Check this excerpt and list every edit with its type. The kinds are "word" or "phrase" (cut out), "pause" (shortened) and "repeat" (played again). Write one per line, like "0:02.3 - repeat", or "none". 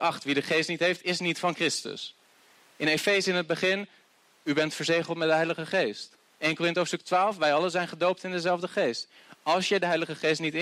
none